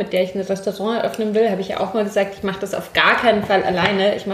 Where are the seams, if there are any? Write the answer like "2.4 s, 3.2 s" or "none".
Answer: none